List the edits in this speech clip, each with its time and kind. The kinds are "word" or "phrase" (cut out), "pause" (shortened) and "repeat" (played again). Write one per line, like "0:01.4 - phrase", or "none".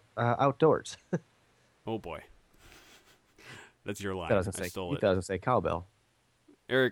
0:03.8 - word

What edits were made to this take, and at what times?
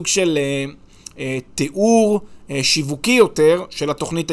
none

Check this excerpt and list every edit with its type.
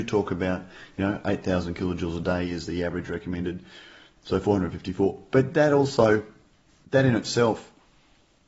none

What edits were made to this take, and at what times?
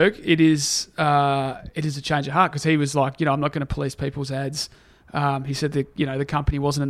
none

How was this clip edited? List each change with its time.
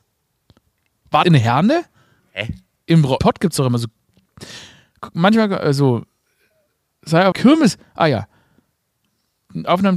0:01.2 - word
0:02.2 - pause
0:03.2 - word
0:07.3 - word

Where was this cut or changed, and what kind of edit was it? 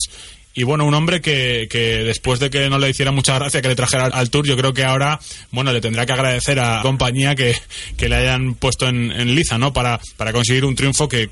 0:04.1 - word
0:06.8 - phrase

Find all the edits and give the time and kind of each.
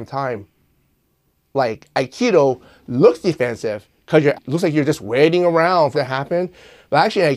0:04.3 - word
0:05.9 - word

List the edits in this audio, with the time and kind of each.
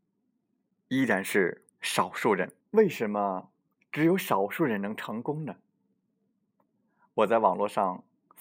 0:01.7 - pause
0:02.6 - pause
0:03.7 - pause

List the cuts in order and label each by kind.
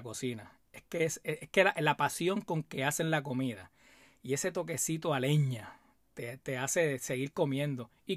none

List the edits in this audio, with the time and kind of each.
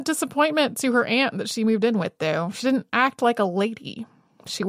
none

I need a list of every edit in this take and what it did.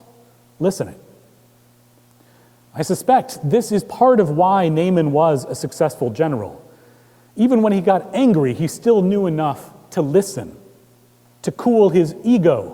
none

